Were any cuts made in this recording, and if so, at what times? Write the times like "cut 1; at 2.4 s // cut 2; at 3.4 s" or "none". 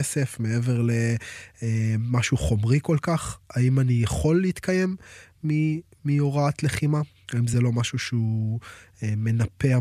none